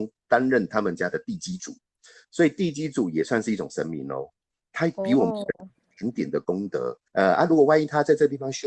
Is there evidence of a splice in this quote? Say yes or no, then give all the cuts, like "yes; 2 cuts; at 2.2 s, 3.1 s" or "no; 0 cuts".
yes; 2 cuts; at 5.7 s, 7.1 s